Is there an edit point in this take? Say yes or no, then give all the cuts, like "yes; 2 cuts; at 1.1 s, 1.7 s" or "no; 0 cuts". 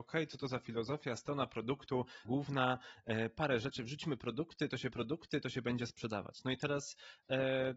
yes; 2 cuts; at 2.2 s, 4.9 s